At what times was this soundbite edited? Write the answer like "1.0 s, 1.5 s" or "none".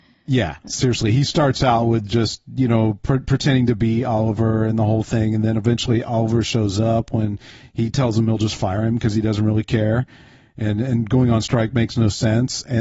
none